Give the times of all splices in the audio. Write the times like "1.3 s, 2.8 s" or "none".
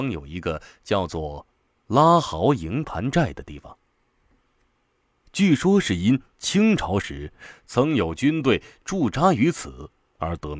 none